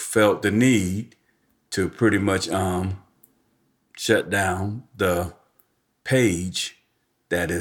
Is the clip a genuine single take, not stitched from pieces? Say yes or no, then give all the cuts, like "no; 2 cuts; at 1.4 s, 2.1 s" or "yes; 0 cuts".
yes; 0 cuts